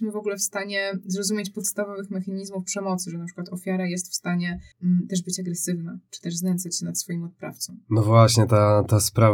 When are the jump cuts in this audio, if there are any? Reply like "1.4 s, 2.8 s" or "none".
4.7 s